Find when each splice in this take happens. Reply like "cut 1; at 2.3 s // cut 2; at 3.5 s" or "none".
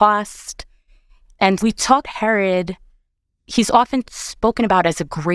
cut 1; at 1.6 s // cut 2; at 2.0 s